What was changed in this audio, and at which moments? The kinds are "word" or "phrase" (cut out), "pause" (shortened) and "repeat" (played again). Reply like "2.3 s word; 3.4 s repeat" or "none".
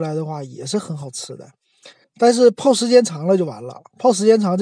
2.0 s pause